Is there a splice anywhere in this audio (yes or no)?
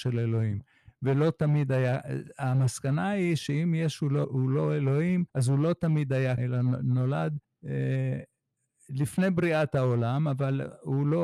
yes